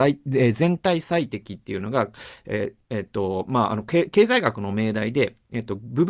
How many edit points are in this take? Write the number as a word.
one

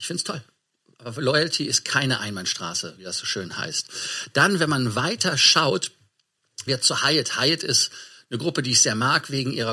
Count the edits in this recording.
two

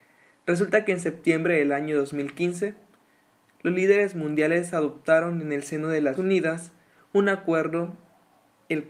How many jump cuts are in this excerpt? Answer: one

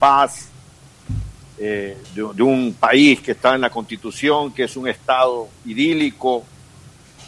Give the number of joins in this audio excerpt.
two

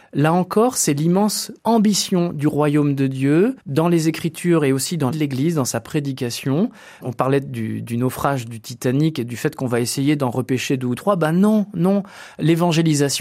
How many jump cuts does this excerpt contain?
three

